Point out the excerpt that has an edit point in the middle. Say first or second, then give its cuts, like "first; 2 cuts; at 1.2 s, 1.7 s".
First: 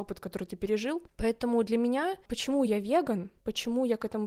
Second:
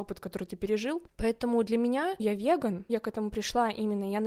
second; 2 cuts; at 2.2 s, 2.9 s